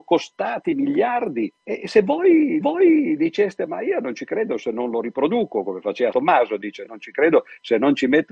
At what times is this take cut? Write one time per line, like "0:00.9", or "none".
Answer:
0:01.6
0:02.6
0:06.1